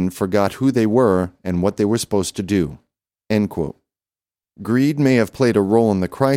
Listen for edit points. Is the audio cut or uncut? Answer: uncut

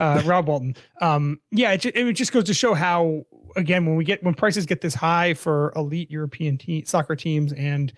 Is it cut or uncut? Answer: uncut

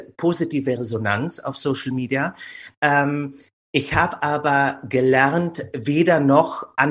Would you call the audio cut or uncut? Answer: uncut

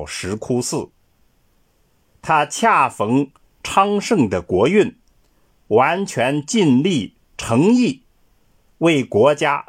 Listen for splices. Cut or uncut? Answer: uncut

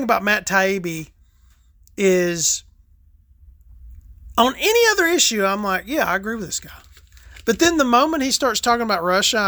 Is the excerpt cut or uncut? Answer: uncut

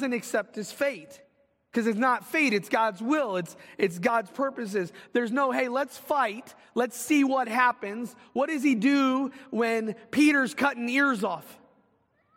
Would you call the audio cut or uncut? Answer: uncut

